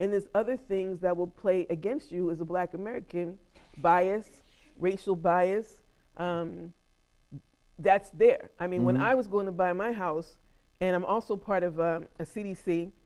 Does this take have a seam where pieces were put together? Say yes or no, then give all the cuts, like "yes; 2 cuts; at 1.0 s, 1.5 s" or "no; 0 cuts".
no; 0 cuts